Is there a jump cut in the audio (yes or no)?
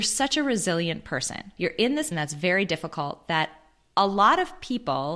yes